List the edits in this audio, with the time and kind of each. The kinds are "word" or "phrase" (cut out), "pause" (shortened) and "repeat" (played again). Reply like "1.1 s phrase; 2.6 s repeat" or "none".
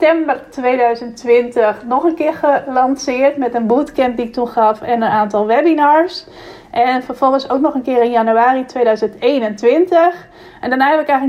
none